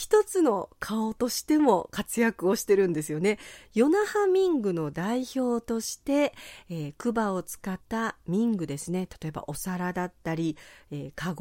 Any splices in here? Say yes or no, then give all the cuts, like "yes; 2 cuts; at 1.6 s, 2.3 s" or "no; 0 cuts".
yes; 1 cut; at 7.8 s